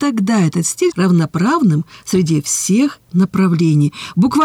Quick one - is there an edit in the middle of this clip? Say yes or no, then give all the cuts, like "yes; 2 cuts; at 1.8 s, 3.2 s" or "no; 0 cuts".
yes; 1 cut; at 0.9 s